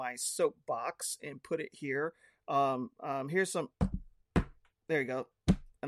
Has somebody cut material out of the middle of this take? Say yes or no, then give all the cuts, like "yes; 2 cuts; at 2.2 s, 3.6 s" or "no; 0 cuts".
no; 0 cuts